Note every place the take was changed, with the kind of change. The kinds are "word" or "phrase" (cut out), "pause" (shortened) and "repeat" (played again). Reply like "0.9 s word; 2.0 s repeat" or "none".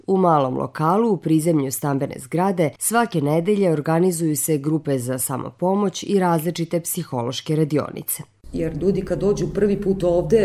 2.8 s pause